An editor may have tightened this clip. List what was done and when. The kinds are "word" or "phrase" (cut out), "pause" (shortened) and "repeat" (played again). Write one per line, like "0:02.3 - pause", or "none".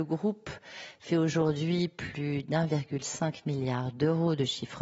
none